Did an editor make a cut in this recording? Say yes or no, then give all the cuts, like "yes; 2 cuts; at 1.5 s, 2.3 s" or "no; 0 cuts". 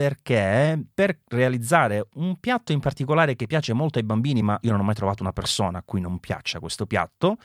no; 0 cuts